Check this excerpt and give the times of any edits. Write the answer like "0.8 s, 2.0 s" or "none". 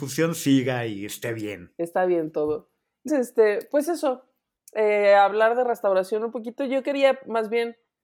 3.1 s